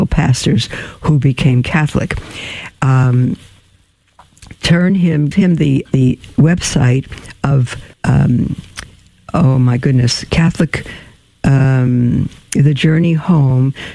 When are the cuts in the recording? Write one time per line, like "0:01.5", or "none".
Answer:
0:05.3
0:05.8
0:07.9